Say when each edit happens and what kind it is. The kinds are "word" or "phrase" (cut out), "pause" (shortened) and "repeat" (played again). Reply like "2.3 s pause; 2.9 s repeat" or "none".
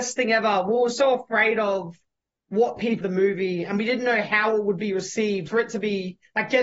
3.0 s phrase; 5.5 s word